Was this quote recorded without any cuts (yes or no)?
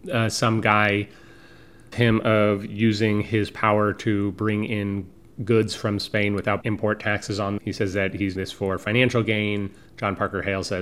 no